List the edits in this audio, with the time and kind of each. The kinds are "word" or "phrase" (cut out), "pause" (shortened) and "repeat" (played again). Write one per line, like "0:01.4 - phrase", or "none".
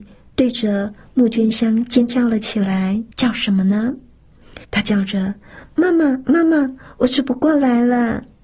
0:03.1 - pause
0:04.6 - pause